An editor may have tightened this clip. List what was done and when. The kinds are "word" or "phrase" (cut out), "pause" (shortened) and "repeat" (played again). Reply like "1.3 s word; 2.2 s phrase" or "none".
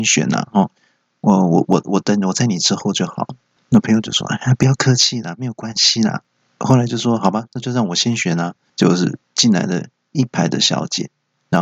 6.2 s pause; 8.7 s pause